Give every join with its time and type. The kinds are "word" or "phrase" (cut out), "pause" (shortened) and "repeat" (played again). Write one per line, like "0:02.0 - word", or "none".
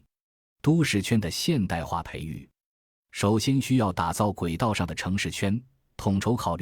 none